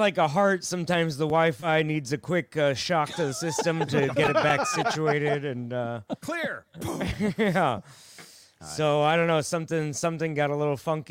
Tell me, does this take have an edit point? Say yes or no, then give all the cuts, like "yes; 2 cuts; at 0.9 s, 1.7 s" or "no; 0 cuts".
no; 0 cuts